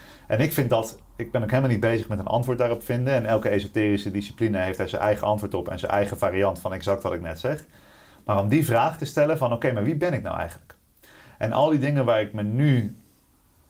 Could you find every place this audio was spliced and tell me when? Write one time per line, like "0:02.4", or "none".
none